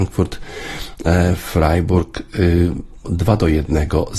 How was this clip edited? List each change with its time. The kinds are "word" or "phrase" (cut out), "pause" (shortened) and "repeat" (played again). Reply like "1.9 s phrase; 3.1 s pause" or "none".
3.0 s word